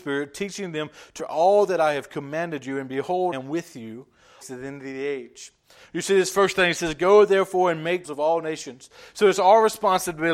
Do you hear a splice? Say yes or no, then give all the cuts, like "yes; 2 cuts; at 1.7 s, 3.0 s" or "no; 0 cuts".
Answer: yes; 4 cuts; at 1.2 s, 3.3 s, 4.4 s, 8.0 s